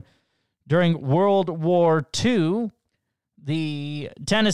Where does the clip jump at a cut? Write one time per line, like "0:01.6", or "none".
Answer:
none